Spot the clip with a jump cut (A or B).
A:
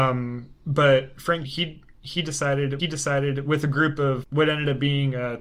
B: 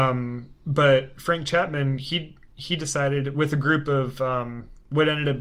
A